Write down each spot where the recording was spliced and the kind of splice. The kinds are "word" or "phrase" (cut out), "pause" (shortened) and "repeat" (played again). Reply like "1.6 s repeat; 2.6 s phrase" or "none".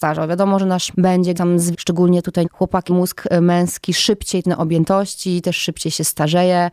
0.9 s word; 1.3 s word; 1.7 s word; 2.4 s word; 2.9 s word; 4.4 s word